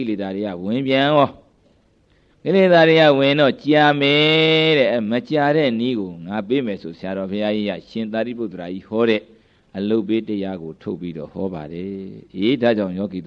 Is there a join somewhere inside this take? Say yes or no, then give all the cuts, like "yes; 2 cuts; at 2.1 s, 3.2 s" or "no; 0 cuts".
no; 0 cuts